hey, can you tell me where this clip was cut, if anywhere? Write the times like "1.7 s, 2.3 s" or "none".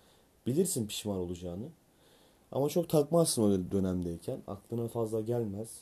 none